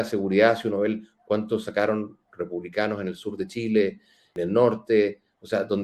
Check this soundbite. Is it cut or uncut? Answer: uncut